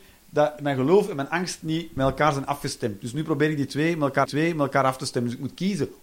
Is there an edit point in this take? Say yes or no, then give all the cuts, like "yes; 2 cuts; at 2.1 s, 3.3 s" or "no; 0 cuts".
yes; 1 cut; at 4.2 s